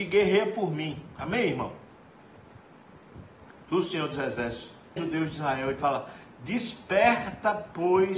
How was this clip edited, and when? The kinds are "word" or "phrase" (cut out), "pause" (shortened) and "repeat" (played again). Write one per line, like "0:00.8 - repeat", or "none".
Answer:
0:05.0 - word
0:05.8 - word